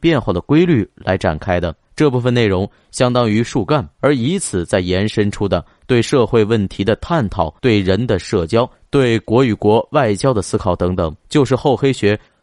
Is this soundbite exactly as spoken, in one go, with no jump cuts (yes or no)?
no